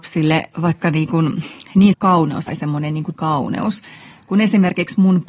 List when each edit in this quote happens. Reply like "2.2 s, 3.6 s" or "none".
1.9 s, 2.5 s, 3.1 s